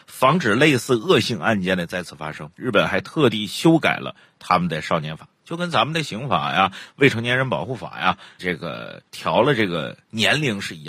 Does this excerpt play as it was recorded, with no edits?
no; 3 cuts; at 2.5 s, 8.4 s, 9.1 s

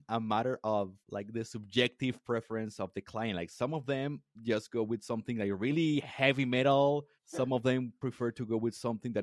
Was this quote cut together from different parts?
yes; 3 cuts; at 1.0 s, 4.3 s, 7.2 s

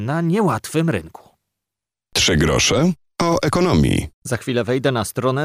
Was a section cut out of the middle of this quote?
yes; 1 cut; at 4.1 s

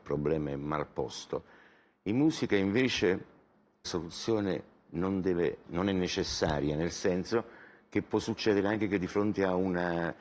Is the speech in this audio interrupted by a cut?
yes; 2 cuts; at 3.8 s, 5.7 s

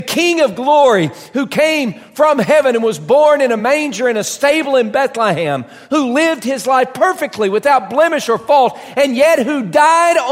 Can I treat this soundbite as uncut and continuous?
yes; 0 cuts

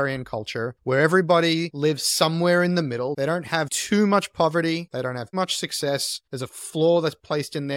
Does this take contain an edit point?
yes; 1 cut; at 5.3 s

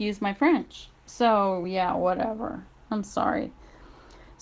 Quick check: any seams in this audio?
no; 0 cuts

